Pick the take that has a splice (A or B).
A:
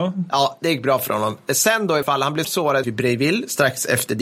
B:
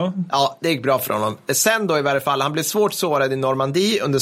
A